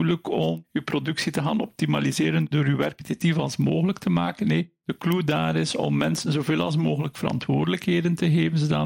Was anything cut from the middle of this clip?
no; 0 cuts

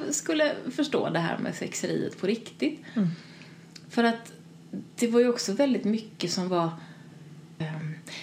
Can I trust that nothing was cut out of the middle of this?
no; 1 cut; at 4.9 s

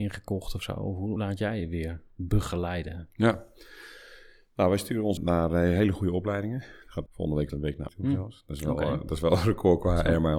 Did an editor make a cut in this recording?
yes; 5 cuts; at 1.2 s, 5.2 s, 7.1 s, 7.5 s, 7.9 s

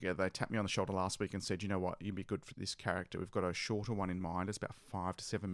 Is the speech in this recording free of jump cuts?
no; 1 cut; at 2.5 s

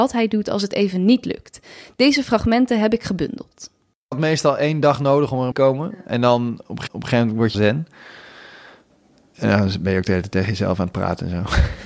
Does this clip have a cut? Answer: yes; 3 cuts; at 5.5 s, 6.9 s, 7.5 s

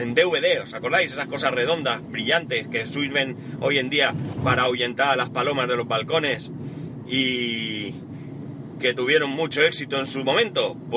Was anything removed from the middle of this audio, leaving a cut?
yes; 1 cut; at 8.8 s

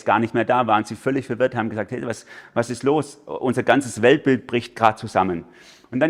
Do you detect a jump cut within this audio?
no; 0 cuts

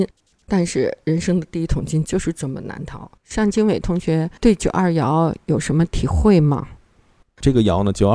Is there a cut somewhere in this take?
yes; 2 cuts; at 3.2 s, 4.4 s

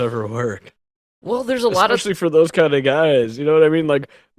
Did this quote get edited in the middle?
no; 0 cuts

